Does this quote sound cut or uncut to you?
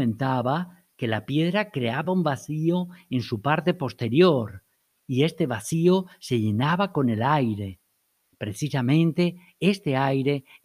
uncut